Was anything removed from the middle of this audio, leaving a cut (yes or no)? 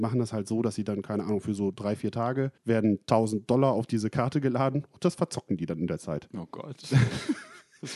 yes